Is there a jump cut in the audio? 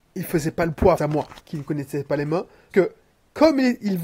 yes; 3 cuts; at 1.0 s, 1.4 s, 2.7 s

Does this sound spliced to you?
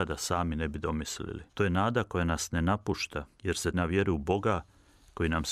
yes; 3 cuts; at 1.5 s, 3.3 s, 3.7 s

